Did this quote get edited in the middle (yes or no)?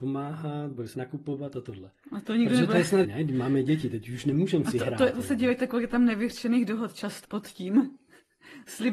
yes